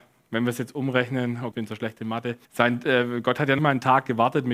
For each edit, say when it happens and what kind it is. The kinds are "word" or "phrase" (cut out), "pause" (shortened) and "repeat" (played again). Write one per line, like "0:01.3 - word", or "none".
0:01.5 - phrase
0:02.4 - pause
0:03.6 - word